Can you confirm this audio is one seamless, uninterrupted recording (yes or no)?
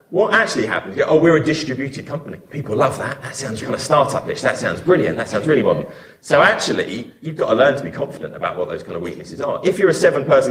no